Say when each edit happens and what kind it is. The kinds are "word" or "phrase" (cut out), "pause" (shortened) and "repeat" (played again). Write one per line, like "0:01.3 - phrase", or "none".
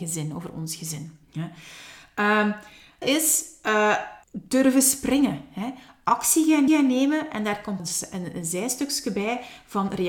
0:01.2 - pause
0:03.0 - word
0:04.2 - pause
0:06.7 - repeat
0:07.8 - phrase